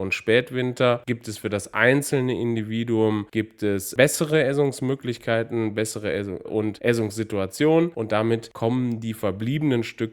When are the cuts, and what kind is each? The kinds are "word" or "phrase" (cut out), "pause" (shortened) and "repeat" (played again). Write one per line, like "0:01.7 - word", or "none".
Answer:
0:06.4 - word